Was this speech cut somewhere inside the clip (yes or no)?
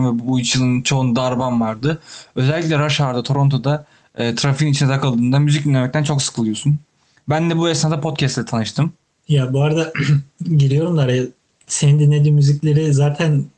no